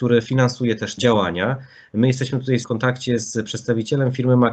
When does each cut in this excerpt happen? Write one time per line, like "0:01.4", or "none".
0:01.0
0:02.6